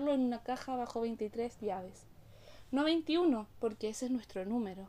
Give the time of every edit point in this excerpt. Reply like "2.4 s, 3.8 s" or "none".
3.5 s